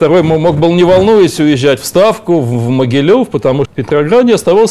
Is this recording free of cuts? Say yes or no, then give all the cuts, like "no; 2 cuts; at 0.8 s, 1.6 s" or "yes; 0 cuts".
no; 1 cut; at 3.6 s